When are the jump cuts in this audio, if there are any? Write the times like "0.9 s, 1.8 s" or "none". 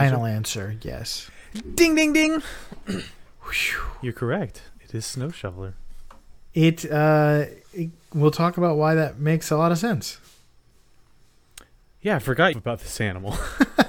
11.7 s, 12.5 s